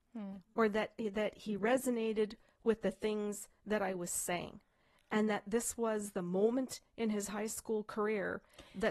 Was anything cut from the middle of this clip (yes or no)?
no